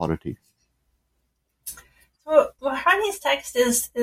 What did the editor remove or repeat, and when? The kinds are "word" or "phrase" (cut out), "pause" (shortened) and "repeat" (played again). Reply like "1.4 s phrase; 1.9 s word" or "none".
2.6 s word